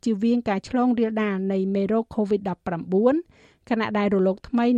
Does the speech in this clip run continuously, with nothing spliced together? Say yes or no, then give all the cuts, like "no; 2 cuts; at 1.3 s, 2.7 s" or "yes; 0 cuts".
yes; 0 cuts